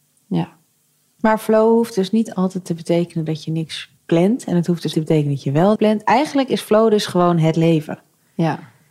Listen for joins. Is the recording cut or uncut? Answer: cut